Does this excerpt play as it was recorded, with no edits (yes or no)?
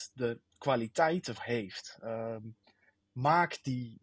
no